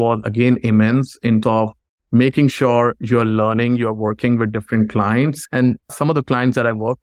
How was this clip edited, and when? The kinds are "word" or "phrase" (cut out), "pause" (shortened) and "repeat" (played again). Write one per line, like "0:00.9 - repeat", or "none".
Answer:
0:01.4 - word